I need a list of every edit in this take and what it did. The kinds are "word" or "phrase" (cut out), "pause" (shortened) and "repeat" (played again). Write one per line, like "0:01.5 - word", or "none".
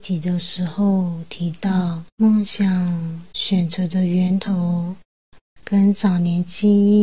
0:02.1 - pause